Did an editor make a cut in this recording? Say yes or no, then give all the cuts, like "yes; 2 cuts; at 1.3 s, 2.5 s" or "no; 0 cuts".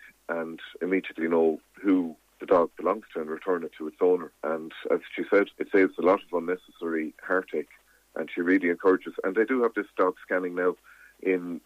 yes; 3 cuts; at 2.3 s, 4.3 s, 5.5 s